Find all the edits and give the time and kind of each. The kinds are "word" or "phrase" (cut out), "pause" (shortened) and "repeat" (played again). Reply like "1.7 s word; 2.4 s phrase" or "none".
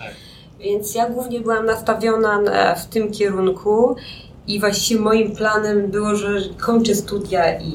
none